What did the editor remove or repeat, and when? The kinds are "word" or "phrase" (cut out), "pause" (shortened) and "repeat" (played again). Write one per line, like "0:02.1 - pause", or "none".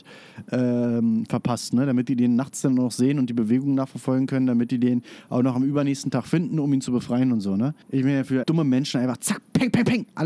0:07.8 - pause
0:08.4 - word